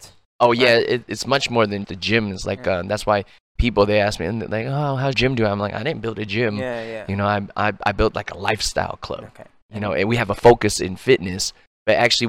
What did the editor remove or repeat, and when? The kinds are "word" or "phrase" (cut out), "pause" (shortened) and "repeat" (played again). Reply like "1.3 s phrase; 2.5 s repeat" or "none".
1.8 s word; 3.6 s word; 5.1 s word